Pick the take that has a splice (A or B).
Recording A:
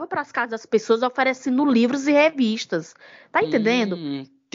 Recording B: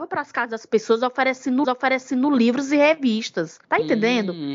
B